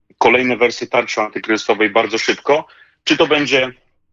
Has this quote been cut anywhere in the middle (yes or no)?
no